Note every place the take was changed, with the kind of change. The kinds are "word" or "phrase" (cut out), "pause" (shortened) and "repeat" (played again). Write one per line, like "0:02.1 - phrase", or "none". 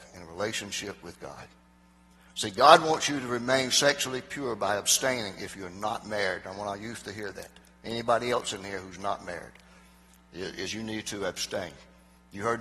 none